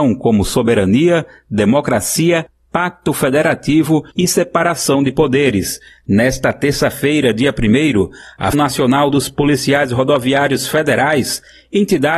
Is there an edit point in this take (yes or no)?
yes